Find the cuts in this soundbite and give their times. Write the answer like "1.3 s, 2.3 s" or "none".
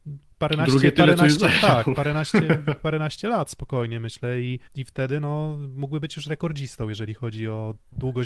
4.7 s